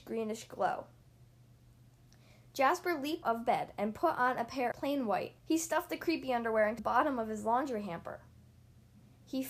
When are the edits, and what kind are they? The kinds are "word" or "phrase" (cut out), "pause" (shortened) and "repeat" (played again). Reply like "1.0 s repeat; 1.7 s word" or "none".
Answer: 3.2 s word; 4.7 s word; 5.4 s pause; 6.8 s word